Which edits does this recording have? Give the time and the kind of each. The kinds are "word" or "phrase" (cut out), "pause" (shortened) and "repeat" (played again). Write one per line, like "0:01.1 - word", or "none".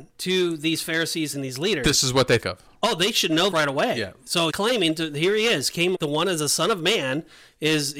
0:01.3 - word
0:02.4 - word
0:03.5 - word
0:04.5 - word
0:05.9 - word